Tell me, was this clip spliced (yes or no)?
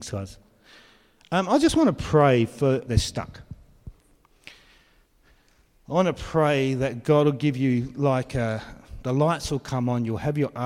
yes